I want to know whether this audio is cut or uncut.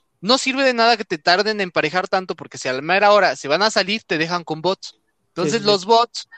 uncut